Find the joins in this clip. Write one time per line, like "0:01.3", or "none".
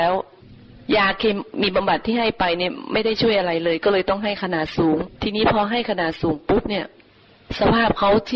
0:05.1

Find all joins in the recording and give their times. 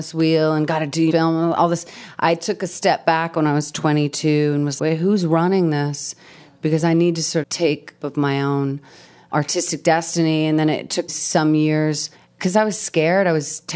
0:01.1
0:04.8
0:07.4
0:08.0
0:11.1
0:12.2

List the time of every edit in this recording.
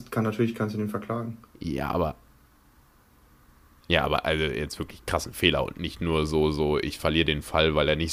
0:01.5

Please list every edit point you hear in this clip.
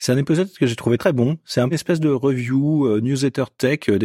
0:01.0
0:01.7

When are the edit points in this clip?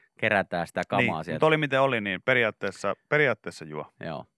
none

